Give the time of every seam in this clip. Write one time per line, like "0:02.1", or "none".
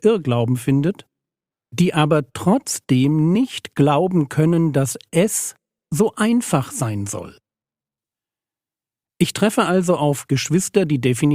none